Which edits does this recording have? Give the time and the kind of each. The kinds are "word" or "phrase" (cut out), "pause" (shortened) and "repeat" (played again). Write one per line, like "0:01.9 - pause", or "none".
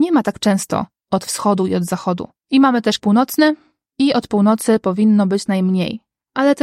0:02.4 - pause
0:03.0 - word
0:05.5 - phrase

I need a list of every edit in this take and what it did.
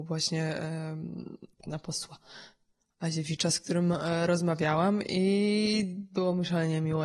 0:01.5 - pause

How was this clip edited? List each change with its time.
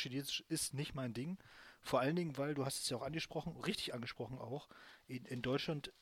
none

